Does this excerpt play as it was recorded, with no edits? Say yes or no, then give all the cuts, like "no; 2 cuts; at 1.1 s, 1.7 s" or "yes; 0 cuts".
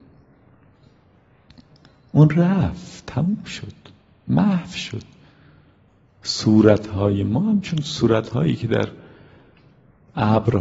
yes; 0 cuts